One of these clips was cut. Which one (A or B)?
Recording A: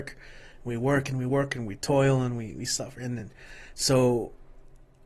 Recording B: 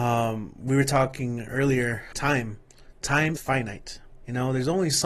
B